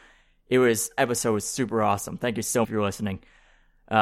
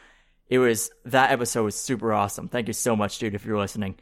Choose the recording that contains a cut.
first; 2 cuts; at 1.0 s, 2.6 s

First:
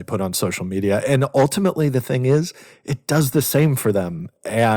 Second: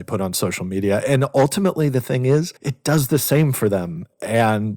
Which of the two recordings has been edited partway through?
second; 1 cut; at 2.6 s

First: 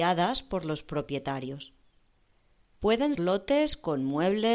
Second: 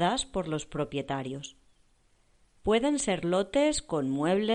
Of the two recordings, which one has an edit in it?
first; 1 cut; at 3.1 s

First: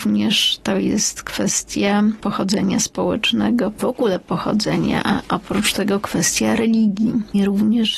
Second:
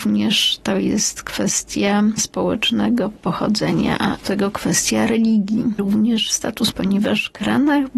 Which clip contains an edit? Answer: second; 5 cuts; at 2.2 s, 3.2 s, 4.2 s, 5.8 s, 6.7 s

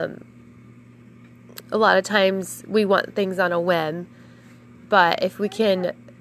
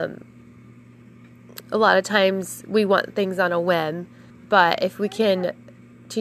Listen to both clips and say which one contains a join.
second; 1 cut; at 4.3 s

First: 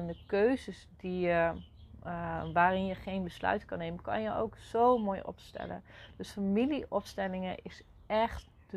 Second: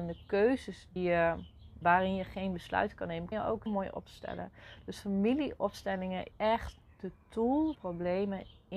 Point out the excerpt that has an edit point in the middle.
second; 6 cuts; at 1.0 s, 1.8 s, 3.3 s, 3.7 s, 6.3 s, 7.7 s

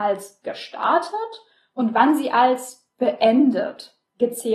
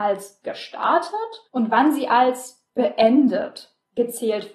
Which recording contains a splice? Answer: second; 1 cut; at 1.4 s

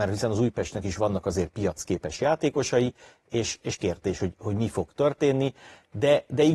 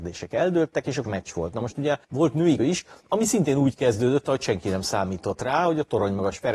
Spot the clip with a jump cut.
second; 4 cuts; at 1.0 s, 2.0 s, 2.6 s, 3.0 s

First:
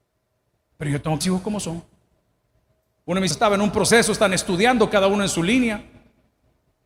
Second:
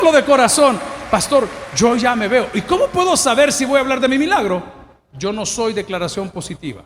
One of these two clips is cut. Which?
first; 2 cuts; at 1.2 s, 3.3 s

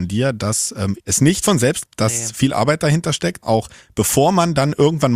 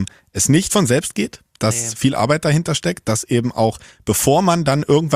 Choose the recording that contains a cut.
first; 3 cuts; at 1.0 s, 1.9 s, 3.4 s

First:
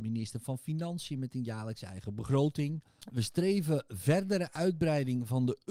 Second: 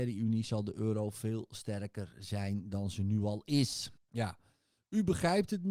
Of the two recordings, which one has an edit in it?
second; 1 cut; at 4.0 s

